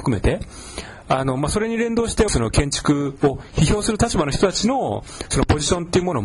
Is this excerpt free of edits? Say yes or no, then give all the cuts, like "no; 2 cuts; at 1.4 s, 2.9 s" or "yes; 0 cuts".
no; 1 cut; at 2.3 s